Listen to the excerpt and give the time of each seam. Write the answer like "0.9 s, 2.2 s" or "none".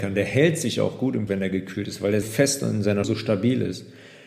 1.3 s, 2.2 s, 3.0 s